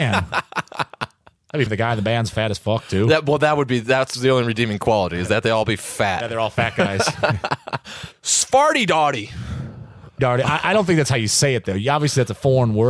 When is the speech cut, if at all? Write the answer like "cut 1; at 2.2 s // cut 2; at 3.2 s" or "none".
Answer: cut 1; at 1.7 s // cut 2; at 10.2 s